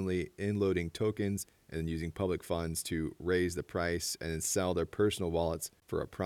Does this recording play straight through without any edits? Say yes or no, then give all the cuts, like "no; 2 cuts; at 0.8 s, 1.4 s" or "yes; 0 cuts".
yes; 0 cuts